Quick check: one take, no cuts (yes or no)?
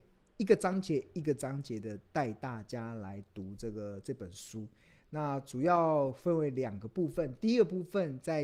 yes